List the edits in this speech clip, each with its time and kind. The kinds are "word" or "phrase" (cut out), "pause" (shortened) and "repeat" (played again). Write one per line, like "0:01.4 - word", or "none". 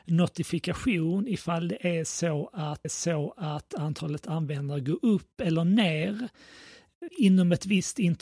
0:02.8 - repeat
0:07.1 - word